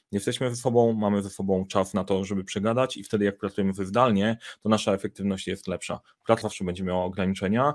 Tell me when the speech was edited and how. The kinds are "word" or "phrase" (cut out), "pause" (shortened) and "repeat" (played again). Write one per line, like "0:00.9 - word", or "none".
0:06.4 - word